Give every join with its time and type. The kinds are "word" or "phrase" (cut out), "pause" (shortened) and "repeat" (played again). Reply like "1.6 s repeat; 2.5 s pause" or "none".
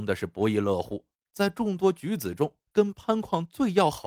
1.1 s pause; 2.7 s pause